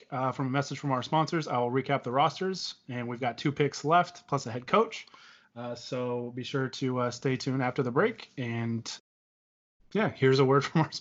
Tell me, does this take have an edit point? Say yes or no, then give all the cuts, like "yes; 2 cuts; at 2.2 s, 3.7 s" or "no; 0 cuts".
no; 0 cuts